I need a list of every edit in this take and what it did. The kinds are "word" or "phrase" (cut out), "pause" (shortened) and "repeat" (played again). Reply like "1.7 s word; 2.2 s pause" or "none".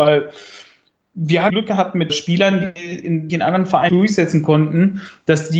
1.5 s phrase; 2.1 s word; 3.3 s phrase; 3.9 s word